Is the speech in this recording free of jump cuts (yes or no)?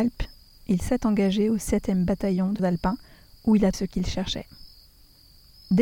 no